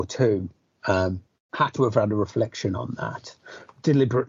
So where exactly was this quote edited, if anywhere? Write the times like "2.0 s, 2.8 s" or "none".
1.3 s